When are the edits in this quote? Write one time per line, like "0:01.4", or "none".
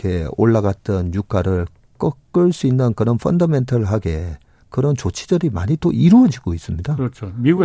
none